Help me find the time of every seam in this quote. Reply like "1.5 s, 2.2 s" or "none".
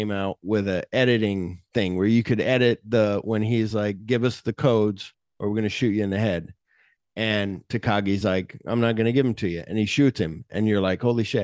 none

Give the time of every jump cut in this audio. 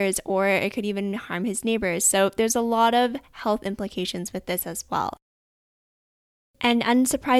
none

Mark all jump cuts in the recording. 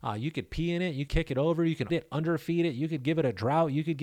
1.1 s, 1.9 s

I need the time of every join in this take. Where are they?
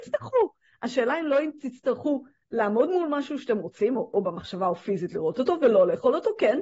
none

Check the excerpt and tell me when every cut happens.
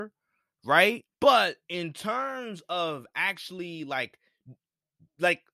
1.1 s

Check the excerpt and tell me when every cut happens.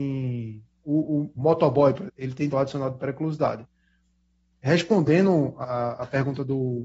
1.4 s, 2.1 s, 2.5 s, 5.6 s

